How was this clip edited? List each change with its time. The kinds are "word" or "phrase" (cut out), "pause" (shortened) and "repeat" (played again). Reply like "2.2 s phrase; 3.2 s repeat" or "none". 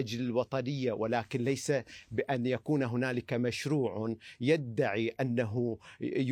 none